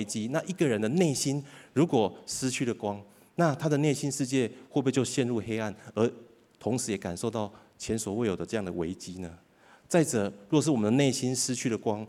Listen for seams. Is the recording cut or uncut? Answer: uncut